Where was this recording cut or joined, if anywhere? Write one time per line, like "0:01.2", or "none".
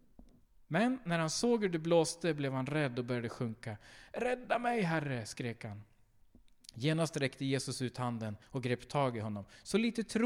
0:08.4

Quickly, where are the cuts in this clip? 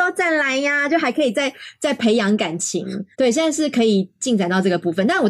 0:03.1

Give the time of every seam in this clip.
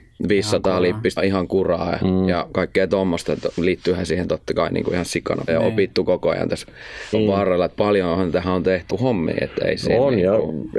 0:01.2
0:05.5
0:07.1
0:08.9

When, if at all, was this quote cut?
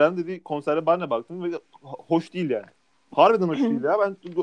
none

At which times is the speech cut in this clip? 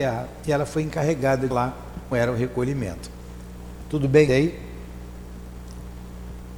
0:01.5
0:02.1
0:04.3

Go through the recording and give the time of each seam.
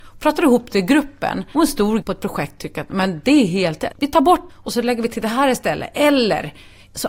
0:01.5
0:02.0
0:03.9
0:04.5

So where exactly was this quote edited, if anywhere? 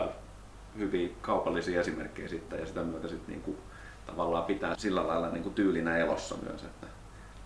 0:02.5
0:04.7

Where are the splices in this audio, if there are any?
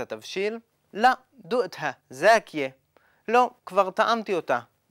0:02.0
0:03.6

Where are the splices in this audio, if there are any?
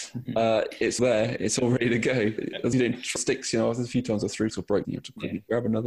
0:01.0
0:02.4
0:02.7
0:03.2
0:04.5
0:04.8

